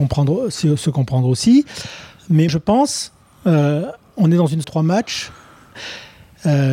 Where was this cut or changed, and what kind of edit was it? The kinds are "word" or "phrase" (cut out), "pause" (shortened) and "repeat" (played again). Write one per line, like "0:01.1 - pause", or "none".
0:02.5 - word
0:04.6 - phrase